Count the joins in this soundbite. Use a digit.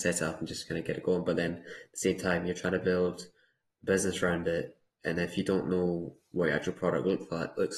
0